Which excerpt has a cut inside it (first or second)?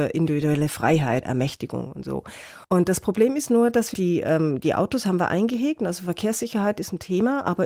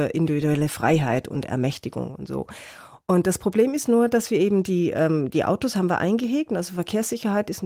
first